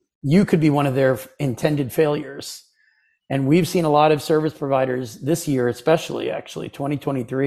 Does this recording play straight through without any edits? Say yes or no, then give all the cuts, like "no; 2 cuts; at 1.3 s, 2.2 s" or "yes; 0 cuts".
yes; 0 cuts